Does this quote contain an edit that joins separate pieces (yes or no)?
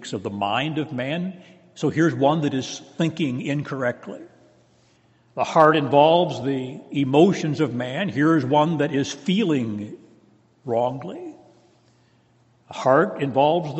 no